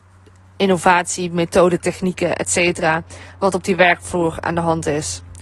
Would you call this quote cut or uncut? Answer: uncut